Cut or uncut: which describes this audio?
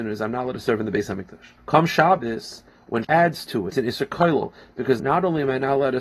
cut